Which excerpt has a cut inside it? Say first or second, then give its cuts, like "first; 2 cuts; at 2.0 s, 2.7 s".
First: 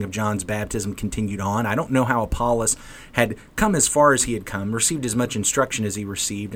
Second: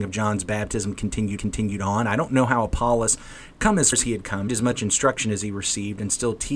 second; 4 cuts; at 1.4 s, 3.5 s, 3.9 s, 4.5 s